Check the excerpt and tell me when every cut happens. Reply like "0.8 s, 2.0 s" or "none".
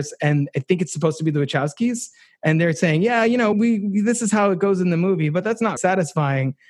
3.5 s, 5.8 s